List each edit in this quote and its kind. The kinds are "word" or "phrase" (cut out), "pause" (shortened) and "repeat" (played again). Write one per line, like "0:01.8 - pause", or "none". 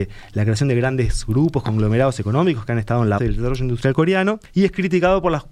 0:03.2 - word
0:04.4 - pause